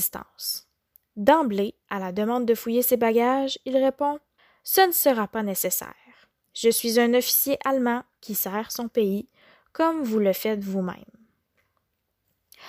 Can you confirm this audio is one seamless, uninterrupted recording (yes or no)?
no